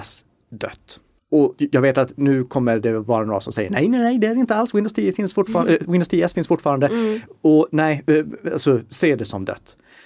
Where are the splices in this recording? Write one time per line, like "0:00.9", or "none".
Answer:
0:01.2